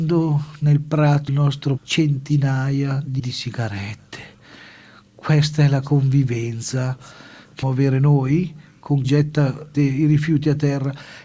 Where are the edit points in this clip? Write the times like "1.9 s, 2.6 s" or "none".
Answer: 1.3 s, 1.8 s, 3.2 s, 7.6 s, 9.0 s, 9.7 s